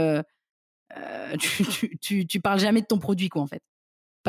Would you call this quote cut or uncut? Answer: uncut